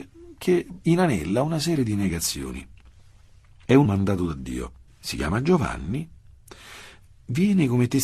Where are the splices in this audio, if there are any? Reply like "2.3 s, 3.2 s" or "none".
3.9 s, 4.9 s